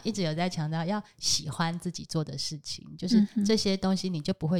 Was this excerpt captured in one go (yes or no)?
yes